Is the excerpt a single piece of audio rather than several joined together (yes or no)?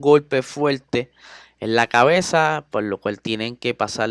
yes